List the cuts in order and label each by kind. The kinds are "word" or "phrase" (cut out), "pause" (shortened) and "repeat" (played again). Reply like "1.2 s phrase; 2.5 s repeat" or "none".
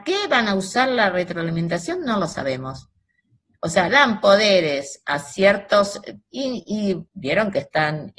3.9 s word; 7.1 s word